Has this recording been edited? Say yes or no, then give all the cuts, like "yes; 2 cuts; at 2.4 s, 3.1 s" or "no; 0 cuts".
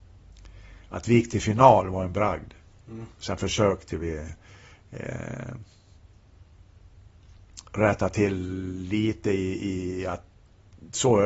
yes; 2 cuts; at 3.1 s, 7.7 s